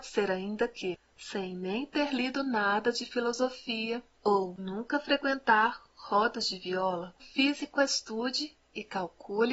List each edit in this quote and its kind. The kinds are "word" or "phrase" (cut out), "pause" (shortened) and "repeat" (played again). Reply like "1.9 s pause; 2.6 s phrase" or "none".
4.6 s word; 7.2 s word